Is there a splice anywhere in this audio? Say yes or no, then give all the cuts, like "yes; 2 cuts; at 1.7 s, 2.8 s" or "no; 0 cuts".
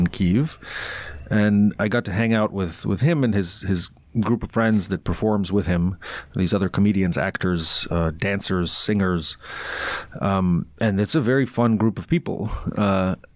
no; 0 cuts